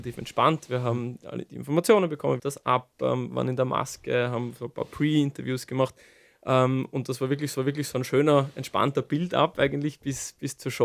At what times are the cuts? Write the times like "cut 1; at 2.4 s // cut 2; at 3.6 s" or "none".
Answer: cut 1; at 2.4 s // cut 2; at 7.5 s